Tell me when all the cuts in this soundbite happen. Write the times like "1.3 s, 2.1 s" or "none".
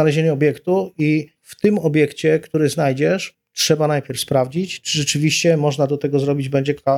1.4 s